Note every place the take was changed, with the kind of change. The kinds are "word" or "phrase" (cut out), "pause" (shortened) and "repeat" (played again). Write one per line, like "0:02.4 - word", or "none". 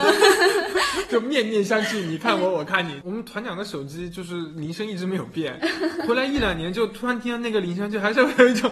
0:01.1 - phrase